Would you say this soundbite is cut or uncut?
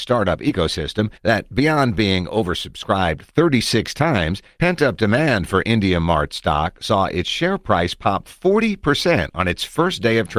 cut